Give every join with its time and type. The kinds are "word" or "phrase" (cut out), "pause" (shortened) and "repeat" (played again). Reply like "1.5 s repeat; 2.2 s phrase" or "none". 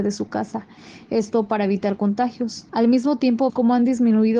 2.7 s pause; 3.5 s word